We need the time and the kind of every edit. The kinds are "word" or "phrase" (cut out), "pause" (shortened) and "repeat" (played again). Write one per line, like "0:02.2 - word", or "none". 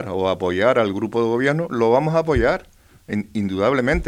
none

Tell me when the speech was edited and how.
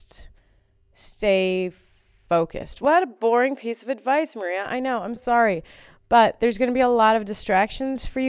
0:05.2 - word

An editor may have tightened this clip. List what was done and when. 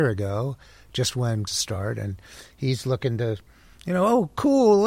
0:01.5 - phrase

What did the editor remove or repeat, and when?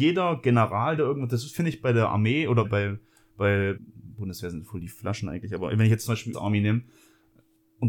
0:01.0 - word
0:02.6 - word
0:03.8 - word
0:06.3 - word

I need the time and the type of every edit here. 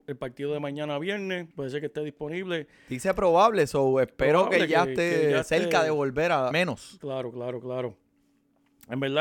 0:01.5 - pause
0:06.5 - phrase

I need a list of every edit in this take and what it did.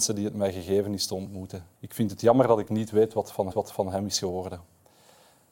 0:01.7 - pause
0:03.5 - repeat

